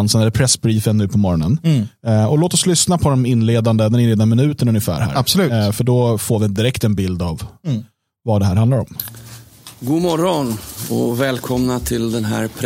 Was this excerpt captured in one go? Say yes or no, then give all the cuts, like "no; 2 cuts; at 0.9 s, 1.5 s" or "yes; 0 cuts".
yes; 0 cuts